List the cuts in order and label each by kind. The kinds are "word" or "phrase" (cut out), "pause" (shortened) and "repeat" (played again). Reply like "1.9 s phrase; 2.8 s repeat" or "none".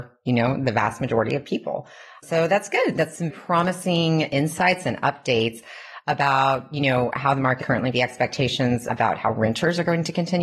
3.3 s word; 7.6 s word; 7.9 s word